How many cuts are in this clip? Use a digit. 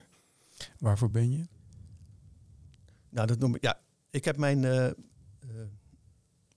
0